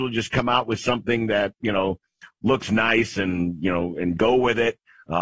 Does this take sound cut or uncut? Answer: cut